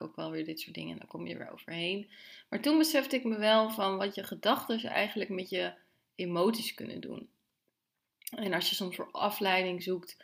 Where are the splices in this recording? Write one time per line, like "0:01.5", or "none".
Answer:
none